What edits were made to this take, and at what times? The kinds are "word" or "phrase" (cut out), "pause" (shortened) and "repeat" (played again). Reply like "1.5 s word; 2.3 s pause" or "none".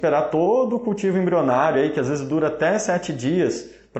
none